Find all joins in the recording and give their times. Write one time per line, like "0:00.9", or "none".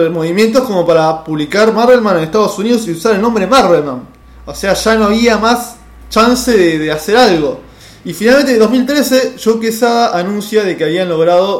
none